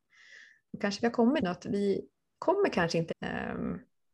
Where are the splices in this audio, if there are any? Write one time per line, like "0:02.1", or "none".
0:01.4
0:03.1